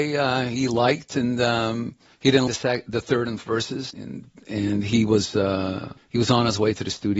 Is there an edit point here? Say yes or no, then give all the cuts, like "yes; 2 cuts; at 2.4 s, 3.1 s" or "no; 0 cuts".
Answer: yes; 5 cuts; at 2.1 s, 2.5 s, 3.4 s, 3.9 s, 6.0 s